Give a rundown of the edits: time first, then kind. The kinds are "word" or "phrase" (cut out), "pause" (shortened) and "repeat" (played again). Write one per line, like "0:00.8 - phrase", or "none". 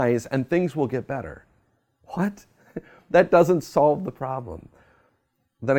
none